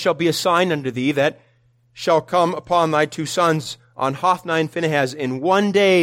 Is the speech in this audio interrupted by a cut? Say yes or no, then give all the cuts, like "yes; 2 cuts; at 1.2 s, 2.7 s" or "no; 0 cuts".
no; 0 cuts